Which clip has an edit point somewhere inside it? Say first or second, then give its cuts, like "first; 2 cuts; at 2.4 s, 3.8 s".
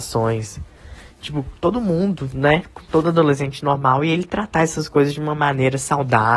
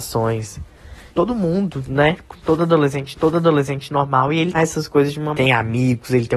second; 4 cuts; at 1.1 s, 3.1 s, 4.5 s, 5.3 s